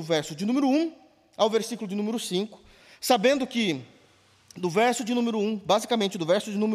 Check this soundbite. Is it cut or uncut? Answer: uncut